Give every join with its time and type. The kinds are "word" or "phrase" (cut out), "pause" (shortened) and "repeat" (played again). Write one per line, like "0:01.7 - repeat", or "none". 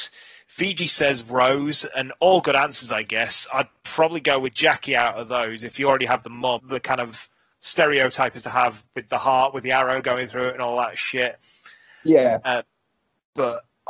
0:06.6 - word